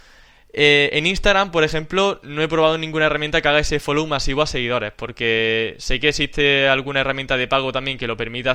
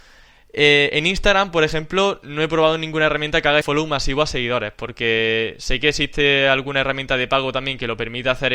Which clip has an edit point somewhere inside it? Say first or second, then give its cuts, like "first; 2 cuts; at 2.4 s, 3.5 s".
second; 1 cut; at 3.6 s